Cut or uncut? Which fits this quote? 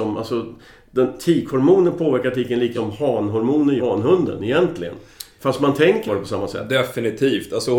cut